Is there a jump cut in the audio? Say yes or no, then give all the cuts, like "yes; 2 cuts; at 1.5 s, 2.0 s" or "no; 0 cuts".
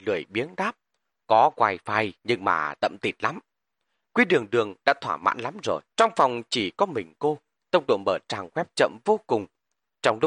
yes; 2 cuts; at 2.2 s, 5.9 s